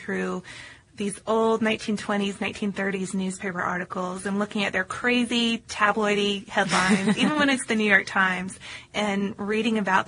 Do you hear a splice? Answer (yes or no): no